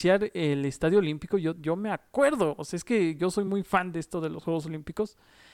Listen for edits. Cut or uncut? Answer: uncut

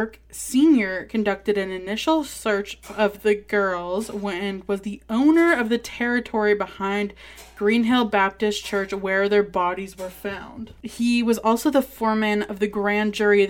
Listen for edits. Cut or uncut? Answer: uncut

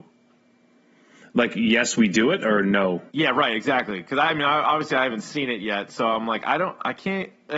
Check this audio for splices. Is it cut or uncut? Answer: cut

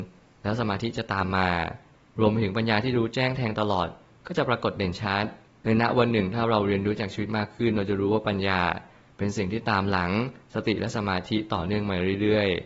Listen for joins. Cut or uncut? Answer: uncut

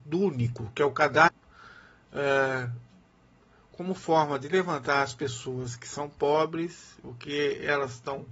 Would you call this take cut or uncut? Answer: uncut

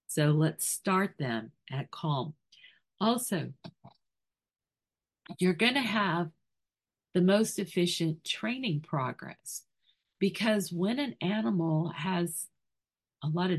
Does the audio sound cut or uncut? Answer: uncut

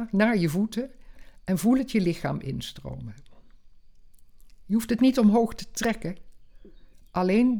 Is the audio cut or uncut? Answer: uncut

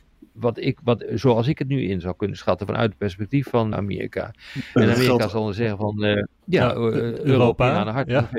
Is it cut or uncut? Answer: cut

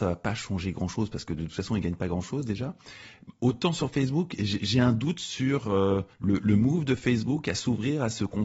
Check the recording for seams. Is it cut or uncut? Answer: cut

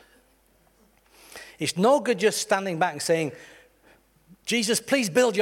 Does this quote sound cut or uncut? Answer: uncut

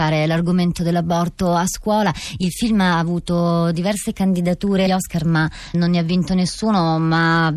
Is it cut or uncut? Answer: cut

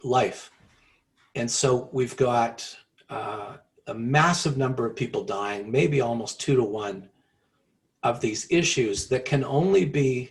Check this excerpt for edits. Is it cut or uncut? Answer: uncut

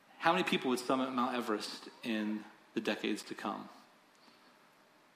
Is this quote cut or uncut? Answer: uncut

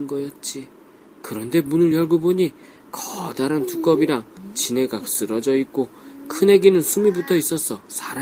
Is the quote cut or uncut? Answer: uncut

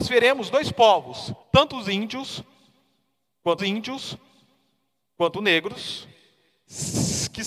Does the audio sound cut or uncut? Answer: cut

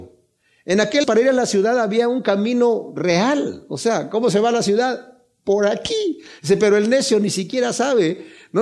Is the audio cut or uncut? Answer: cut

